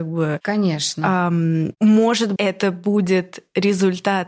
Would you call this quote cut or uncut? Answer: cut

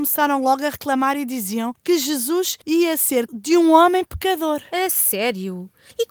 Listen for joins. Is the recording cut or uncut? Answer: cut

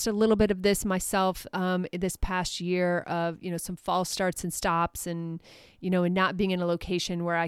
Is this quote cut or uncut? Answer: uncut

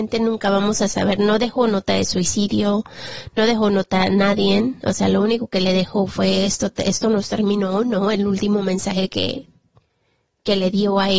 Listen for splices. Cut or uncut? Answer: uncut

